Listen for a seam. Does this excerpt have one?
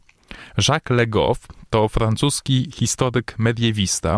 no; 0 cuts

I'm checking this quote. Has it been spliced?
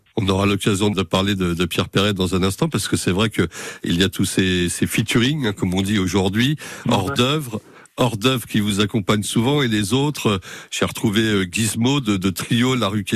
yes; 1 cut; at 0.9 s

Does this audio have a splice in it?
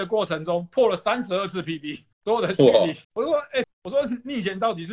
yes; 3 cuts; at 2.1 s, 3.0 s, 3.6 s

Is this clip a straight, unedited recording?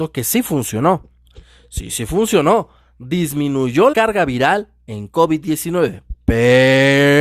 no; 1 cut; at 3.9 s

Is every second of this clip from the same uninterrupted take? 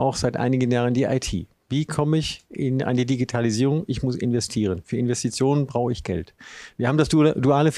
yes; 0 cuts

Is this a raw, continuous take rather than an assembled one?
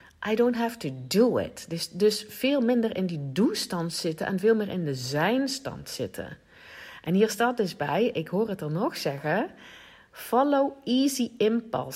yes; 0 cuts

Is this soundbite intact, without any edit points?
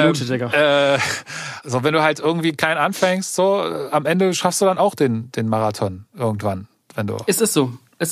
yes; 0 cuts

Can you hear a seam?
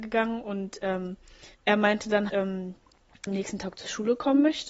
yes; 3 cuts; at 1.5 s, 2.3 s, 3.3 s

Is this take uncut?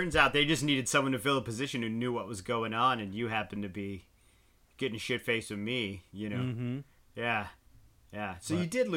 yes; 0 cuts

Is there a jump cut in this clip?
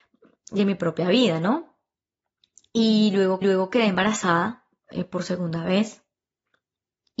yes; 1 cut; at 3.4 s

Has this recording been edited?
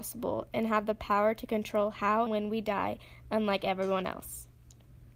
yes; 1 cut; at 2.3 s

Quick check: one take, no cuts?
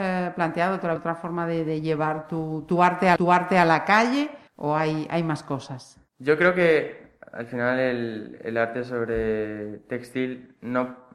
no; 4 cuts; at 1.0 s, 3.2 s, 4.5 s, 6.1 s

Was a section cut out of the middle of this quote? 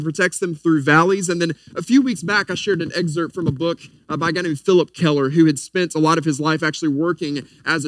no; 0 cuts

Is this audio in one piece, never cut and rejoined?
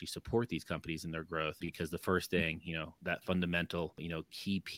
yes; 0 cuts

